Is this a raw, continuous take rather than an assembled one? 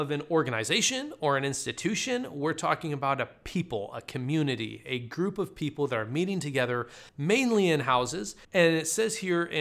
no; 2 cuts; at 7.1 s, 8.4 s

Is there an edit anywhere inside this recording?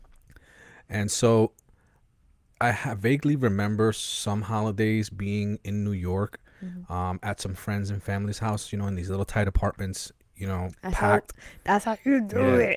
no; 0 cuts

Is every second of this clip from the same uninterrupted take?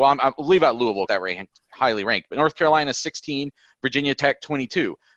no; 1 cut; at 1.1 s

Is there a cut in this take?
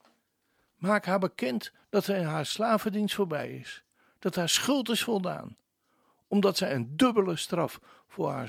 no; 0 cuts

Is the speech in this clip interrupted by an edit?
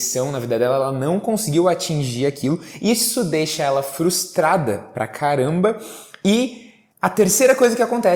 yes; 1 cut; at 6.9 s

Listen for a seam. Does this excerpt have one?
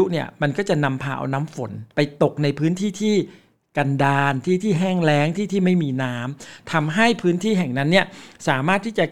yes; 1 cut; at 1.9 s

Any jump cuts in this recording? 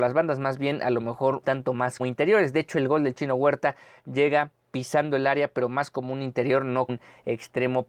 yes; 3 cuts; at 1.4 s, 2.0 s, 6.9 s

